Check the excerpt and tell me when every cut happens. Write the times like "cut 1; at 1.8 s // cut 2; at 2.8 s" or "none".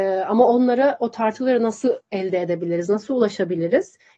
cut 1; at 2.0 s